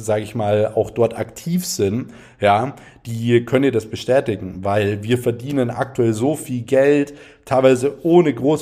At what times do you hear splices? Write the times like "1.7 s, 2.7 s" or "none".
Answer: none

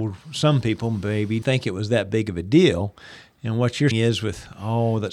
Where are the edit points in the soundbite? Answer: 1.4 s, 3.9 s

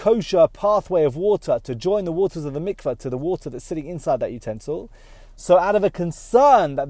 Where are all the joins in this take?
none

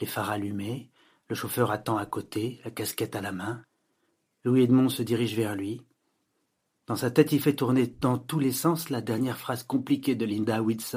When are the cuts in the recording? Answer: none

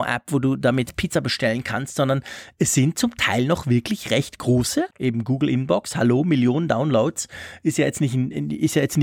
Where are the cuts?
4.9 s

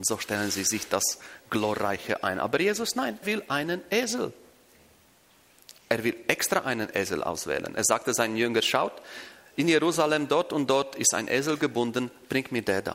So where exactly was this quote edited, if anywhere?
3.2 s, 5.8 s

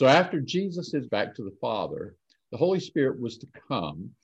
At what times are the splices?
1.1 s

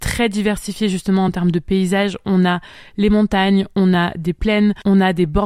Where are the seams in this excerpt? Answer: none

